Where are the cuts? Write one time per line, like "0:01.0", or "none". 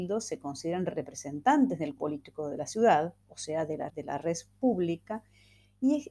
0:02.0
0:03.9